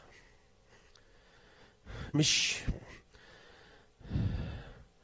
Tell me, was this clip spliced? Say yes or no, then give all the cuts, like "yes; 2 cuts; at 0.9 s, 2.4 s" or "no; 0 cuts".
yes; 1 cut; at 2.1 s